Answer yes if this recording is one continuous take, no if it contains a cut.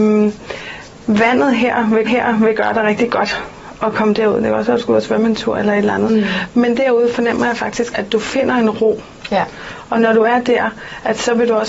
no